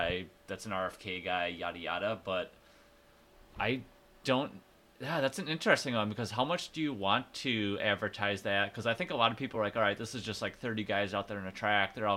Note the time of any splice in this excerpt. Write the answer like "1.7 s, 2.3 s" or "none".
none